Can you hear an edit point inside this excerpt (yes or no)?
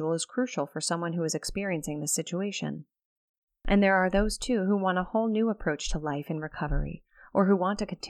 no